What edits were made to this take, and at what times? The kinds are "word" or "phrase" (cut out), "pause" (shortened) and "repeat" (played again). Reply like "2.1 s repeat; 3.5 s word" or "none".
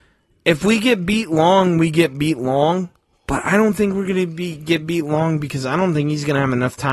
none

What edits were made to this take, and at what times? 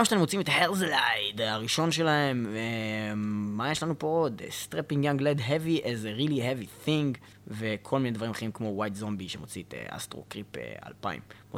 7.3 s pause

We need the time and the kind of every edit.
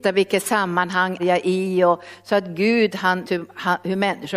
1.2 s word; 3.2 s word

